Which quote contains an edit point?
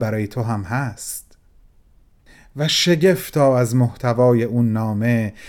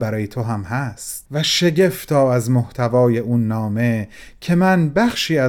second; 1 cut; at 1.3 s

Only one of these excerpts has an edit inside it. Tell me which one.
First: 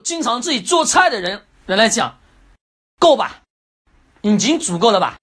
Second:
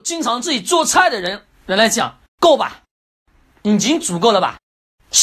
second; 1 cut; at 2.2 s

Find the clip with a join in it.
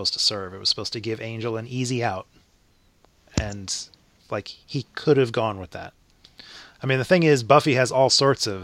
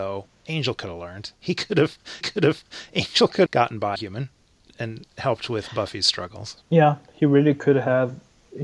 second; 4 cuts; at 2.2 s, 3.5 s, 4.0 s, 6.6 s

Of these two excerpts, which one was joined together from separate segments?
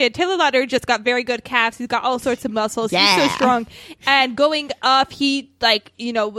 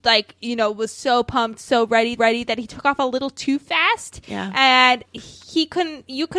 second; 2 cuts; at 2.2 s, 5.1 s

